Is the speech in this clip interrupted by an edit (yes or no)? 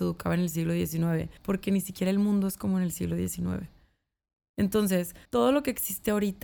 yes